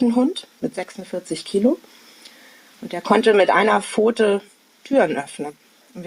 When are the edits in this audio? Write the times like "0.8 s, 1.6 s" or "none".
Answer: none